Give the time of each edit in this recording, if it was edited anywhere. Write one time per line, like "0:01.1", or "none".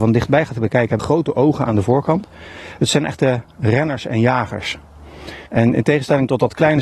0:01.0
0:05.5